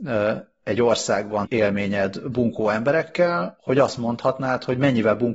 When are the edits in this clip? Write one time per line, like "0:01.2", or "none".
0:01.4

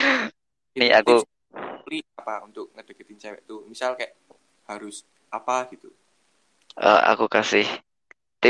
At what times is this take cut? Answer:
none

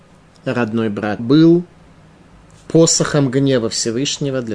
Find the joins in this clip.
0:01.2

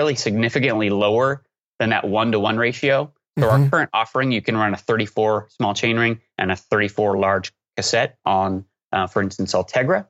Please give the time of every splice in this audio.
none

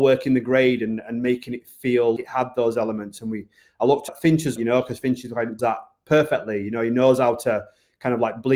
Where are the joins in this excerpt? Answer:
0:02.2
0:04.1
0:04.6
0:05.6

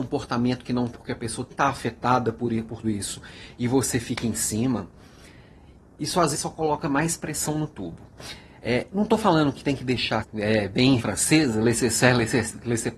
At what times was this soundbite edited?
0:00.9
0:01.5
0:02.8
0:06.3
0:10.2
0:11.0

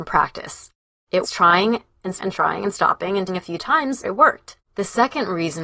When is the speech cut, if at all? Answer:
0:01.2
0:02.2
0:03.3
0:04.0
0:04.6

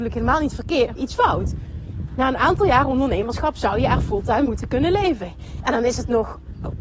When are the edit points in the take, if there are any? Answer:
0:01.0
0:04.5

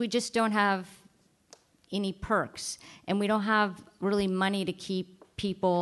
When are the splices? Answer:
none

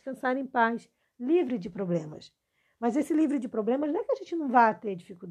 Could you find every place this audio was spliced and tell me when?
none

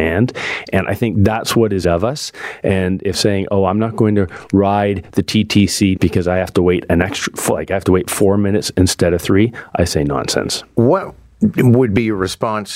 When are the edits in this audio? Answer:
0:01.8
0:03.1
0:06.0

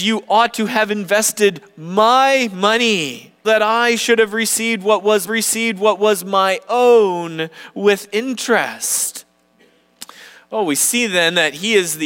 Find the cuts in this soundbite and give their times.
0:03.4
0:05.3

